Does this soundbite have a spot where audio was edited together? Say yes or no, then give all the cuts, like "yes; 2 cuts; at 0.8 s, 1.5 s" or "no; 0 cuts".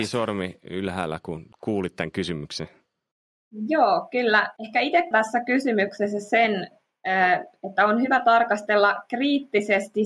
yes; 3 cuts; at 1.5 s, 4.6 s, 5.1 s